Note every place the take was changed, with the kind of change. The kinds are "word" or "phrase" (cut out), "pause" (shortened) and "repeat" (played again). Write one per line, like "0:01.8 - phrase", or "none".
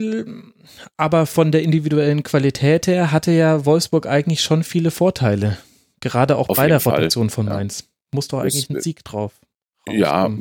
none